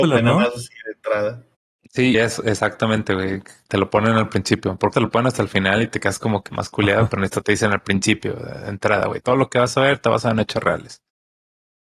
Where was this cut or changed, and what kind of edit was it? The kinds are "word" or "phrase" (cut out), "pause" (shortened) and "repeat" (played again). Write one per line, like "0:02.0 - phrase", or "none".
0:02.1 - word
0:03.7 - word
0:04.9 - word
0:06.5 - word